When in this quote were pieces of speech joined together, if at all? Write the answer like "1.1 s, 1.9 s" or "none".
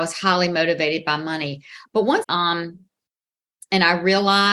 2.2 s

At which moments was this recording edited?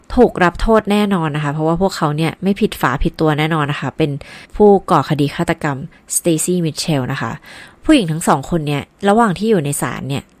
4.4 s

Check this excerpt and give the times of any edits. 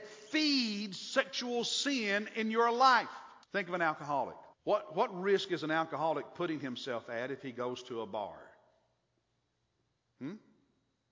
3.4 s, 4.5 s

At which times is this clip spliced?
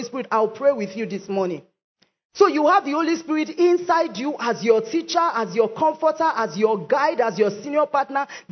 none

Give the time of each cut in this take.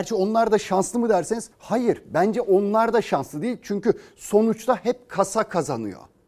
1.5 s

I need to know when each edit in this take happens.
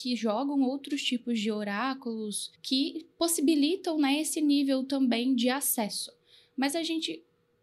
2.5 s

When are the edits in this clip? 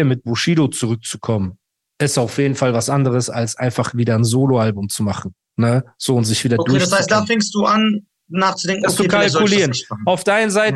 none

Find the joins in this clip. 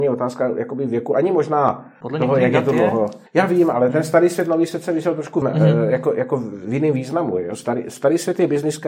2.0 s, 3.3 s, 5.4 s

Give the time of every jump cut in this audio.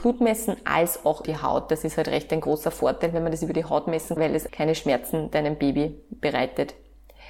1.2 s, 4.2 s, 4.5 s

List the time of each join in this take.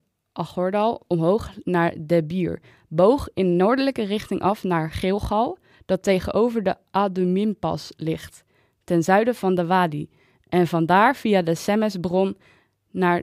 none

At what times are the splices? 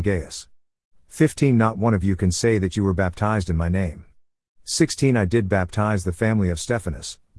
none

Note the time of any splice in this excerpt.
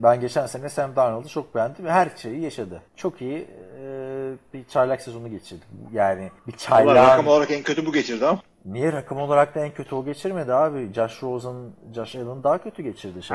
2.9 s, 6.4 s

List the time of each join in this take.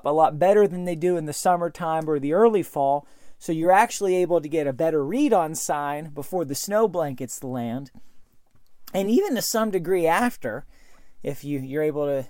none

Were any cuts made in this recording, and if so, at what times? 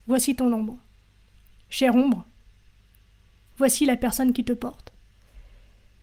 none

